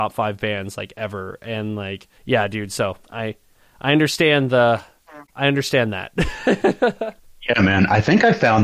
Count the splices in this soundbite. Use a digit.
4